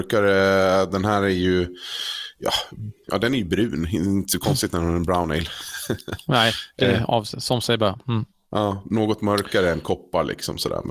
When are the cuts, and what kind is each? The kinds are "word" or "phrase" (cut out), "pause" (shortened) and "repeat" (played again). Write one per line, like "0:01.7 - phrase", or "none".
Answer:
none